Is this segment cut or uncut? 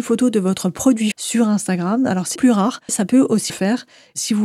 cut